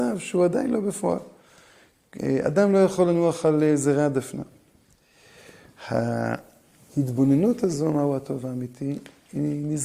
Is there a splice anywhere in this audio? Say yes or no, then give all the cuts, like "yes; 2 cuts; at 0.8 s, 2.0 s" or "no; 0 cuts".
no; 0 cuts